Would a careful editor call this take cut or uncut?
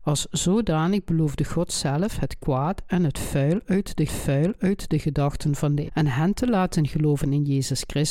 cut